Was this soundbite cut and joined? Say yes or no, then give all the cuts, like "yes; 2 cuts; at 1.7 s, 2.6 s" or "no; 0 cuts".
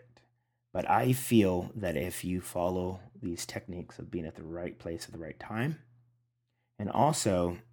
no; 0 cuts